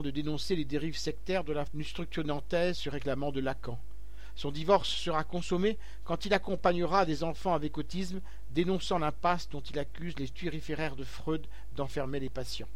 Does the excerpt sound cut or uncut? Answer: cut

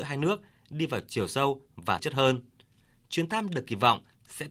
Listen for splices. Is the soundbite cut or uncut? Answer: cut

